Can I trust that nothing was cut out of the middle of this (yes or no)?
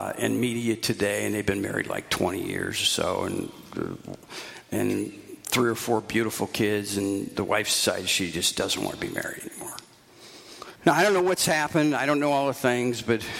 no